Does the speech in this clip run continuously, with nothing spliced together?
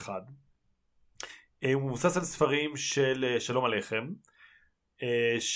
yes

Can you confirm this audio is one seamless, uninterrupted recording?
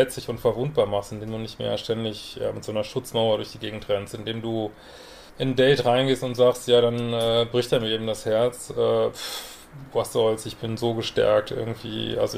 no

